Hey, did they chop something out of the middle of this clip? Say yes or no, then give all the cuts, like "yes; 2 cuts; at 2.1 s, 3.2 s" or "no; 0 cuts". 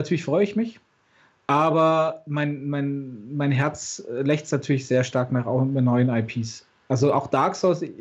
no; 0 cuts